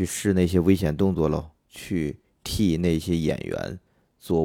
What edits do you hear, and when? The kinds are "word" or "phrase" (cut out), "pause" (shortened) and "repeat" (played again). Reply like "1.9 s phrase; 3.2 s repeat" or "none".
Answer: 1.6 s pause

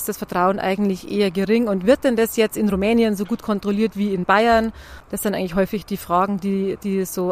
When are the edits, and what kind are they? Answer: none

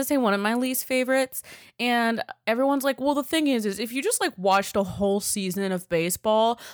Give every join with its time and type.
none

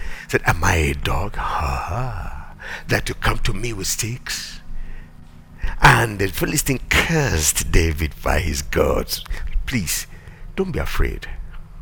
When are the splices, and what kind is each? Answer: none

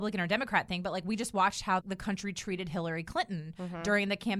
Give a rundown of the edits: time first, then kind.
1.8 s word

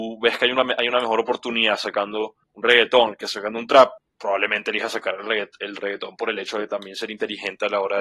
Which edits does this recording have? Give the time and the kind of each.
2.4 s pause; 4.0 s word

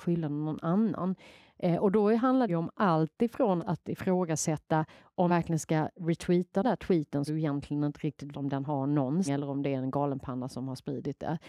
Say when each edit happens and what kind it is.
2.5 s word; 3.6 s word; 5.3 s word; 6.6 s word; 7.3 s word; 8.3 s word; 9.3 s word

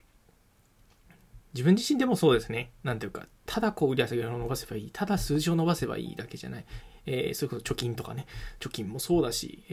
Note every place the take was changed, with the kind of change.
none

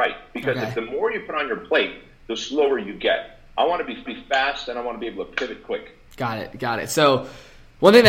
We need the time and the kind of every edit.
4.1 s repeat

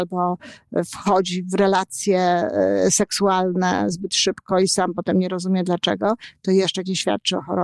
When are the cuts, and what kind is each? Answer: none

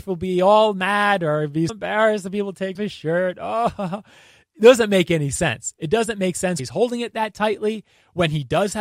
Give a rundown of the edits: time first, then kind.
1.7 s word; 2.8 s word; 6.6 s word

